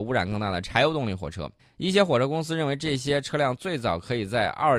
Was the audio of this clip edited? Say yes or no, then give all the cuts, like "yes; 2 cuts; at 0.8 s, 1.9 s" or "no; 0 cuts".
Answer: yes; 1 cut; at 1.6 s